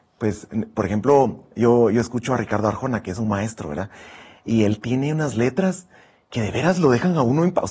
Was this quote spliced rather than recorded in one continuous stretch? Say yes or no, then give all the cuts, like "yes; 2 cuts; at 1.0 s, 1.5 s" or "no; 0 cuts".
no; 0 cuts